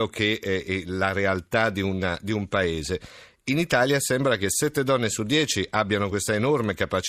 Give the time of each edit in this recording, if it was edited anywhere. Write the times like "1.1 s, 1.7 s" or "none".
none

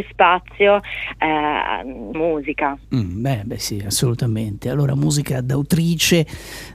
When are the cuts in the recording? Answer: 2.1 s, 2.8 s, 3.6 s

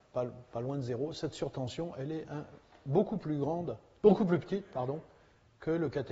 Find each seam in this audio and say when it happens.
none

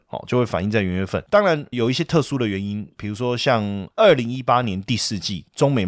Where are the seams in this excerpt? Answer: 1.7 s

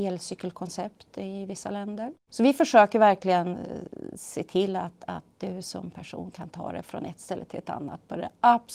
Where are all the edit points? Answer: 2.2 s

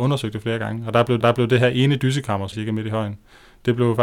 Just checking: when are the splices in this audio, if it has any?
1.2 s, 2.5 s

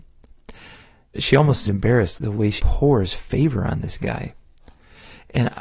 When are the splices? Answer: 1.2 s, 1.7 s, 2.2 s, 2.6 s

